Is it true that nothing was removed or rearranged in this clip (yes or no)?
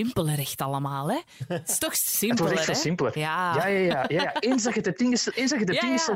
yes